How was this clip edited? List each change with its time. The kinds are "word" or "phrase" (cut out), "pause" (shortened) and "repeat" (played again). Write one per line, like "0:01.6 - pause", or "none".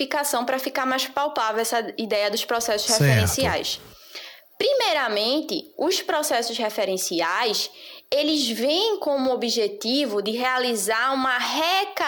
none